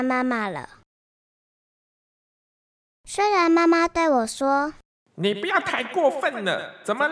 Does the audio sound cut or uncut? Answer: uncut